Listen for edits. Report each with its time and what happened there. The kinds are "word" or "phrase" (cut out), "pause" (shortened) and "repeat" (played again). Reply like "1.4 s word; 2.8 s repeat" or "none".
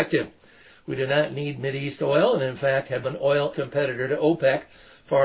3.0 s word; 3.5 s word